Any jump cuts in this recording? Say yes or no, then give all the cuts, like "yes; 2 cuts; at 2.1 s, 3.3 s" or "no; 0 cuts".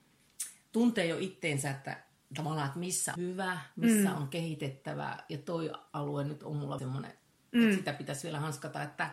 yes; 2 cuts; at 3.2 s, 6.8 s